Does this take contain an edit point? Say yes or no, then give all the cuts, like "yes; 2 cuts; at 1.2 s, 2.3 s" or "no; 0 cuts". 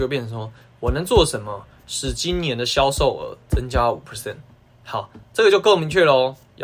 yes; 1 cut; at 4.7 s